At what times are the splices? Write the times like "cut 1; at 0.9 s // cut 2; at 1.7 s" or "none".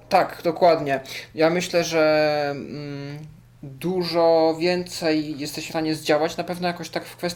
cut 1; at 5.7 s